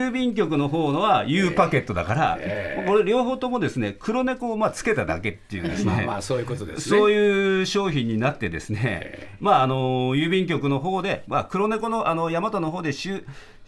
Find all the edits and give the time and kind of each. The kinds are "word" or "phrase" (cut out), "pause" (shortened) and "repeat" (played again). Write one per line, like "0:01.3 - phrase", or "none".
none